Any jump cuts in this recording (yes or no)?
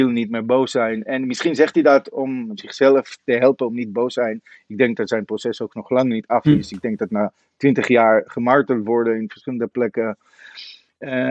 no